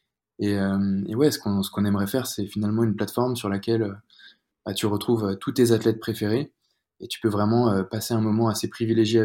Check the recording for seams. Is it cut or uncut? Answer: uncut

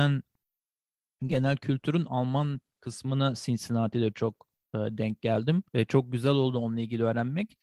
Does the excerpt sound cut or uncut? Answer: cut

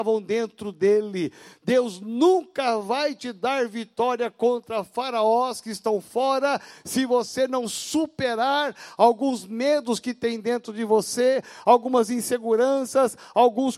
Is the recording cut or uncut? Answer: uncut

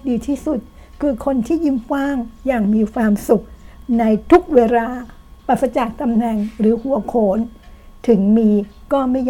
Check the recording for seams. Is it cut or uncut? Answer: cut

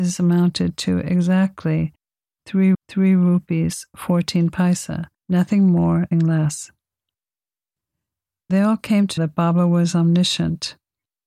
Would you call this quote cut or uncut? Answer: cut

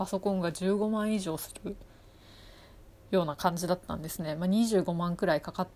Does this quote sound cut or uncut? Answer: uncut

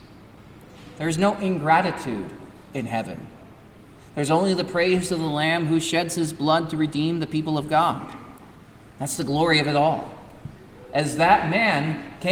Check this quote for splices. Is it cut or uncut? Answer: uncut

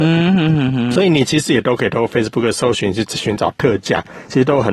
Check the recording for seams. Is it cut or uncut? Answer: uncut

